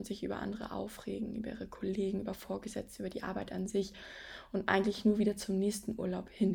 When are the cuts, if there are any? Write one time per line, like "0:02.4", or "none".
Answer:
none